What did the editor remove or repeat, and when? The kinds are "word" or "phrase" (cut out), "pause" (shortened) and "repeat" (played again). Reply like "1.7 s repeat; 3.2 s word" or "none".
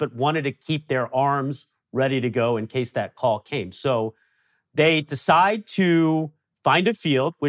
none